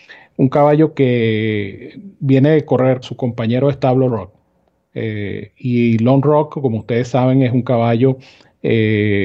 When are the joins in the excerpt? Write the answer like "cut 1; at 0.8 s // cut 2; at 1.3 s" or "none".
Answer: cut 1; at 3.0 s // cut 2; at 4.1 s

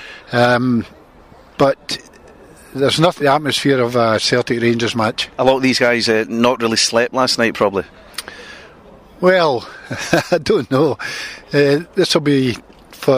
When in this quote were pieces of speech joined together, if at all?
cut 1; at 3.2 s // cut 2; at 5.3 s

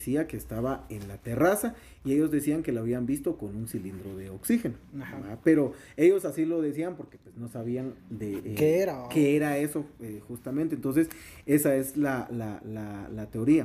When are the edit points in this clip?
none

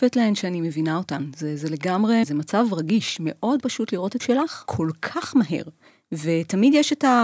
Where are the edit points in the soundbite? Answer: cut 1; at 2.2 s // cut 2; at 3.6 s // cut 3; at 4.2 s // cut 4; at 4.7 s

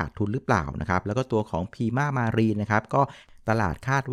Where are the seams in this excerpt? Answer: none

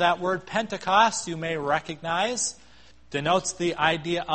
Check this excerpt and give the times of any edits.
cut 1; at 2.9 s

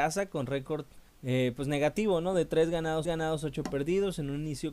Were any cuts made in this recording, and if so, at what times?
cut 1; at 1.1 s // cut 2; at 3.1 s

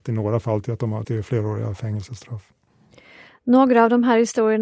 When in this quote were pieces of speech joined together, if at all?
cut 1; at 1.0 s

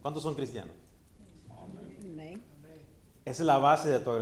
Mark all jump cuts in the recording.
none

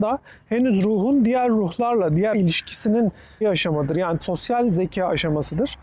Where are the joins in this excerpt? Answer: cut 1; at 2.3 s // cut 2; at 3.4 s // cut 3; at 4.2 s

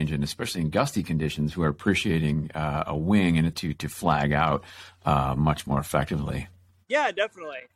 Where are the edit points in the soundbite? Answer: cut 1; at 3.5 s

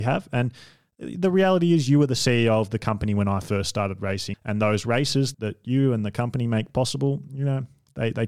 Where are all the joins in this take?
cut 1; at 4.3 s // cut 2; at 5.3 s

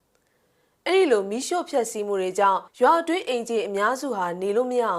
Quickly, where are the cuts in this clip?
cut 1; at 2.7 s

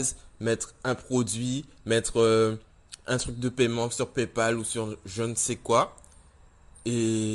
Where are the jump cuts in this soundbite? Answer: none

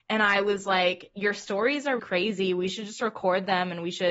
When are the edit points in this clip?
cut 1; at 2.0 s

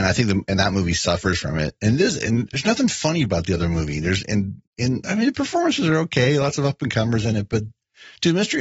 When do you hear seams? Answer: cut 1; at 4.7 s

